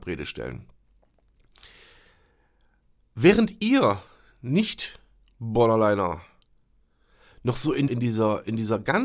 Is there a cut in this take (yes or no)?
yes